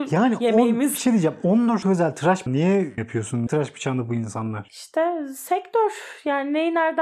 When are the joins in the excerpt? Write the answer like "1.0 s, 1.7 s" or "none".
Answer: 1.8 s, 2.5 s, 3.0 s, 3.5 s